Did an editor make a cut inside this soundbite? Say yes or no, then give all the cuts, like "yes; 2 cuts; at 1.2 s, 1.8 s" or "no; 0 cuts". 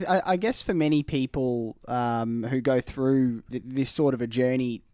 yes; 1 cut; at 3.5 s